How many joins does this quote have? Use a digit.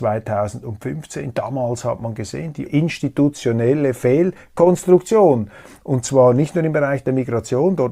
1